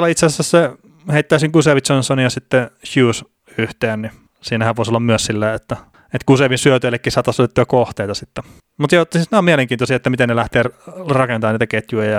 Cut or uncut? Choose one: uncut